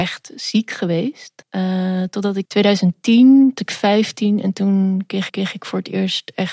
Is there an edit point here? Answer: yes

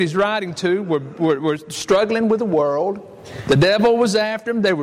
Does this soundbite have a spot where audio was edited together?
no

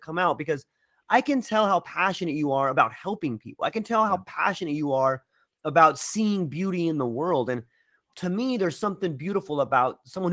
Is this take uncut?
yes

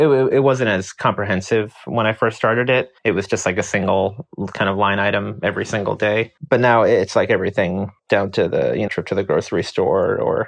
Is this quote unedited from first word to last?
no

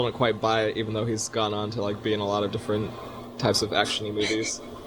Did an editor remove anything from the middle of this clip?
no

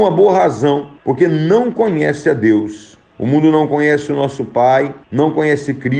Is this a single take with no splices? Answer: no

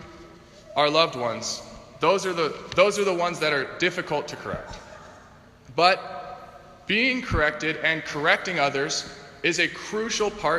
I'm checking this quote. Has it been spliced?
no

